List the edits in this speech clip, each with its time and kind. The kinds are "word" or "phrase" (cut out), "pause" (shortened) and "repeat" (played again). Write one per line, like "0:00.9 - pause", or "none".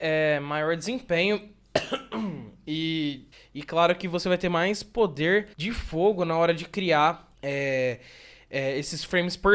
0:03.3 - pause
0:05.5 - pause
0:07.3 - pause